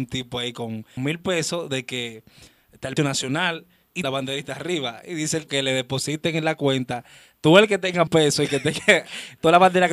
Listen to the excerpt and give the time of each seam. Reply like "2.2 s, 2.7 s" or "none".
1.0 s, 3.0 s, 4.0 s, 5.5 s, 8.1 s